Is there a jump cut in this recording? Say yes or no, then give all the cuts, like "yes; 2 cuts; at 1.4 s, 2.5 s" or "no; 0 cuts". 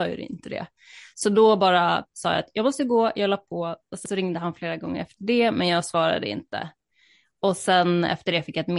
no; 0 cuts